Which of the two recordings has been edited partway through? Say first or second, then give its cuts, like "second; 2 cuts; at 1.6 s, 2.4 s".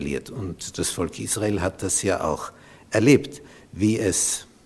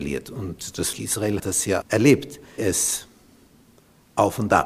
second; 4 cuts; at 0.9 s, 1.4 s, 1.8 s, 2.6 s